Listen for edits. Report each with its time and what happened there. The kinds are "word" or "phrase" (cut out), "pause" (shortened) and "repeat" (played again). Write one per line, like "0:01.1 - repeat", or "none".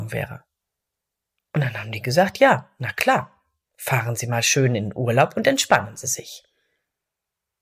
none